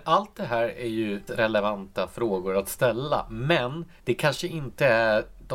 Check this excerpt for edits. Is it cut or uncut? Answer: cut